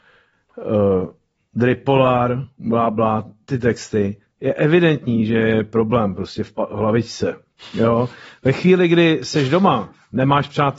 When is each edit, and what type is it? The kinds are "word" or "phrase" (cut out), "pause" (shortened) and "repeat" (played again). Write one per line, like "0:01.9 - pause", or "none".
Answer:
0:02.5 - pause